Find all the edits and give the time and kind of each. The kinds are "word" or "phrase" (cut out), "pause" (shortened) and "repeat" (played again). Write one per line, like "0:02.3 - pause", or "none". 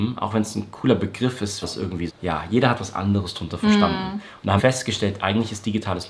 0:01.6 - phrase
0:02.1 - word
0:04.6 - word